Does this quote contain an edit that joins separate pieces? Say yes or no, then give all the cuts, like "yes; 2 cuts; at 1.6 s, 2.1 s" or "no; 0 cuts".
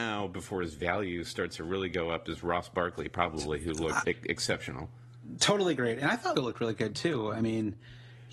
yes; 2 cuts; at 4.0 s, 6.3 s